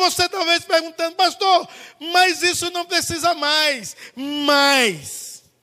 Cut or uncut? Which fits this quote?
uncut